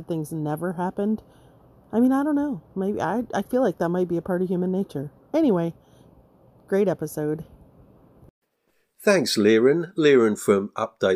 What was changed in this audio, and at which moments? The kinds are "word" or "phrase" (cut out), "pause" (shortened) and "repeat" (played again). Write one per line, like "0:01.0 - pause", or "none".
none